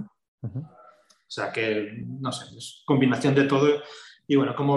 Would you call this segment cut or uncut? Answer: uncut